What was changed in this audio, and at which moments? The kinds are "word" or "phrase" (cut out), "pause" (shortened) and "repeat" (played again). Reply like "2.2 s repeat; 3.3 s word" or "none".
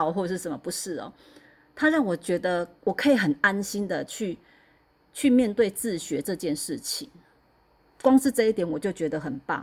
none